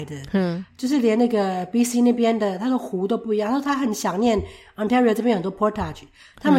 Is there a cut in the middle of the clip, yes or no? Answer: no